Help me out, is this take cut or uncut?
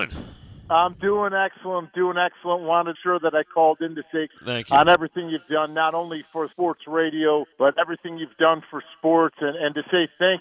cut